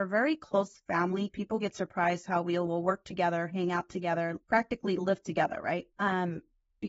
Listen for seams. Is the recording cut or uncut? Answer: cut